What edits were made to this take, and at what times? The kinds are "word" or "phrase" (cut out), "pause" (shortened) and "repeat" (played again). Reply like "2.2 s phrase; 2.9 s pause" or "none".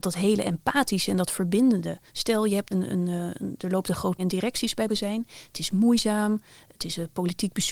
2.1 s pause; 2.7 s word; 4.2 s phrase; 4.9 s word